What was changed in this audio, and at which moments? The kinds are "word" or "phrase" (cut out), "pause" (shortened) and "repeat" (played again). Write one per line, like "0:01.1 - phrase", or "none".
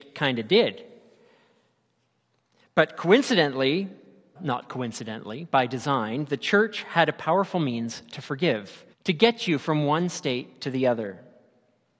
0:04.4 - word
0:08.9 - pause